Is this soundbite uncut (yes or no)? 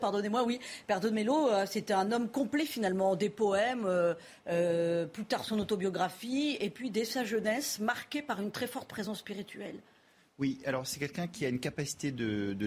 yes